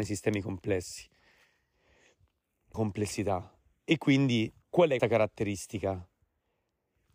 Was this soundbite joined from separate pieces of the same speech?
yes; 3 cuts; at 2.7 s, 4.6 s, 5.0 s

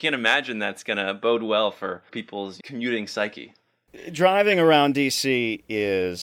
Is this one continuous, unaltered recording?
yes; 0 cuts

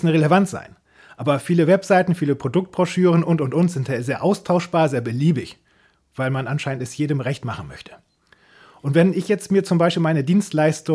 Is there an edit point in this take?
no; 0 cuts

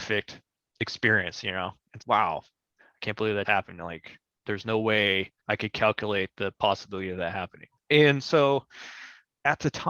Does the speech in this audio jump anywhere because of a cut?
yes; 3 cuts; at 2.0 s, 3.4 s, 5.4 s

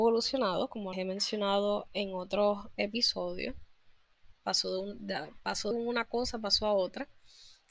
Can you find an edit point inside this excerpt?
yes; 2 cuts; at 0.9 s, 5.7 s

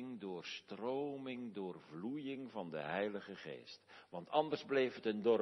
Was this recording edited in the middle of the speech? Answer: no; 0 cuts

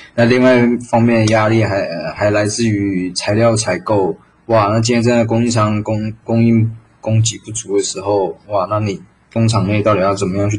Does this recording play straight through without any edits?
yes; 0 cuts

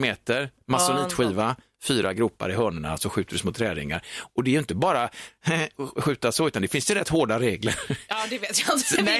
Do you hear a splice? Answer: no; 0 cuts

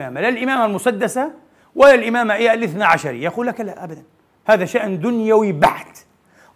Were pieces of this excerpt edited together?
no; 0 cuts

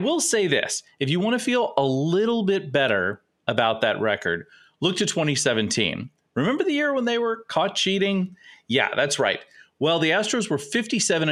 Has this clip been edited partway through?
no; 0 cuts

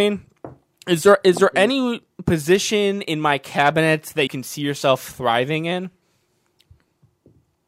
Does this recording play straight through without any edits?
no; 1 cut; at 4.3 s

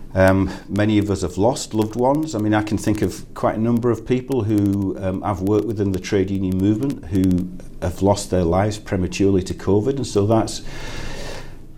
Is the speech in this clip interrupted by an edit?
no; 0 cuts

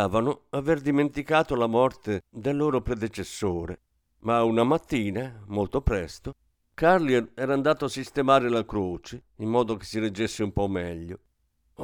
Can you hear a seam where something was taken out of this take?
no; 0 cuts

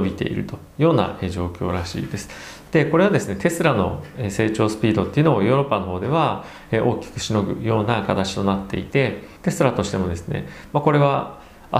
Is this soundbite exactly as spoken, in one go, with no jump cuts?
no; 1 cut; at 9.4 s

